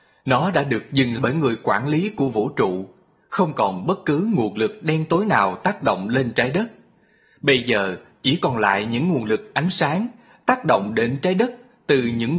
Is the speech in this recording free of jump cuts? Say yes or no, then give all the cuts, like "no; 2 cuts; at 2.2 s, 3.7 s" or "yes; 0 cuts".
no; 1 cut; at 1.2 s